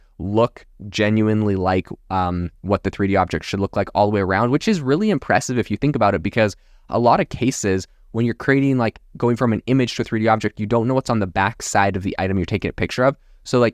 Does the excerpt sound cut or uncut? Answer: uncut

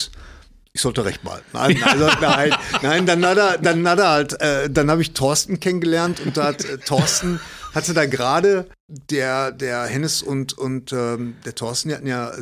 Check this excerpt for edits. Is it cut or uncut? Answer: uncut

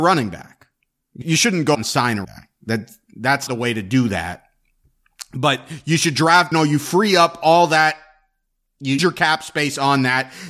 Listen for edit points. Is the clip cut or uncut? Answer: cut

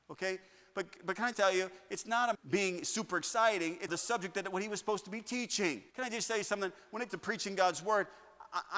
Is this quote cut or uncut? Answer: cut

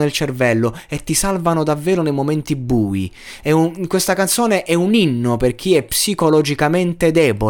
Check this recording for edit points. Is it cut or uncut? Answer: uncut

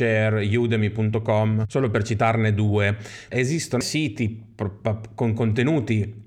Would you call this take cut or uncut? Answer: cut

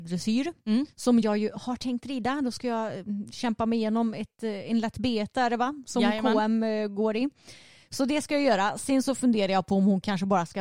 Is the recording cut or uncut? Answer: uncut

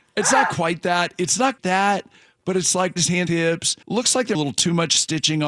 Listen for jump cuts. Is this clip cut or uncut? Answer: cut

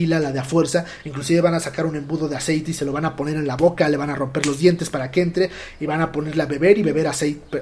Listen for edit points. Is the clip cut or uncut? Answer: uncut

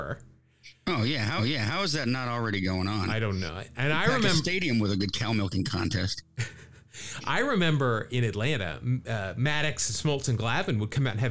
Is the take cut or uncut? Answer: cut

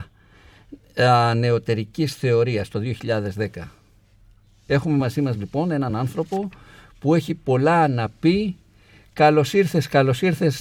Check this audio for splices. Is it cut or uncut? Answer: uncut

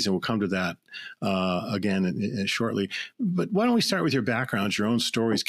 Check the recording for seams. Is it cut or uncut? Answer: uncut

